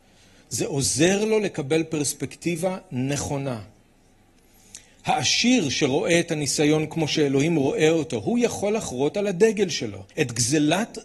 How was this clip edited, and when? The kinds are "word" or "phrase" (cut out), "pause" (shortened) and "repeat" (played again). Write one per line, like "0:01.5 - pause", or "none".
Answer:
0:10.1 - pause

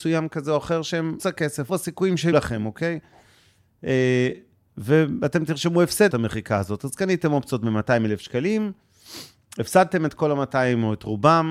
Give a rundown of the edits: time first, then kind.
0:01.2 - word
0:01.7 - word
0:02.3 - word
0:06.1 - word

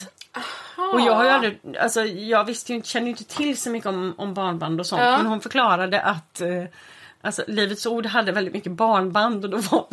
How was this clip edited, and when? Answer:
none

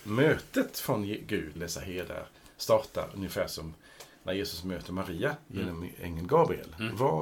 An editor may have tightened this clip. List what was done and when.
0:01.5 - word

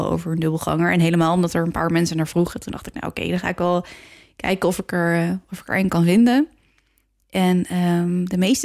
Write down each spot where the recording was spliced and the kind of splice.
none

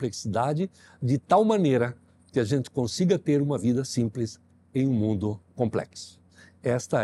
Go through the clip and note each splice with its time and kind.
0:05.5 - pause

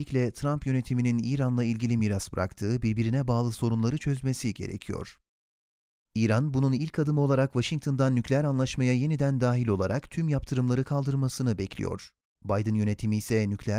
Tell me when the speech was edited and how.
none

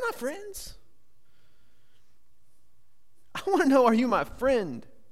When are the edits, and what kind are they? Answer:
none

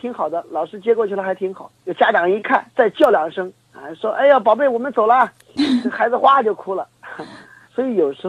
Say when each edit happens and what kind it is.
0:01.8 - pause
0:02.7 - pause

